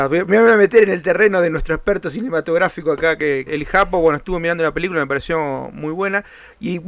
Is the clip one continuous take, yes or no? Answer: no